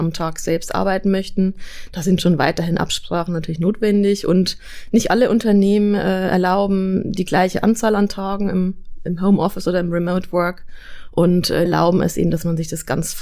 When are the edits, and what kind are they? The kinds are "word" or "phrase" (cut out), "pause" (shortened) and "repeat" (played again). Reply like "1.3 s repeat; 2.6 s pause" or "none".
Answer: 11.7 s phrase